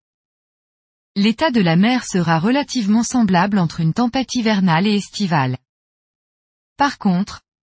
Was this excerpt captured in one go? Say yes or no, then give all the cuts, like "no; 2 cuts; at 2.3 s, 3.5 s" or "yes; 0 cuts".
yes; 0 cuts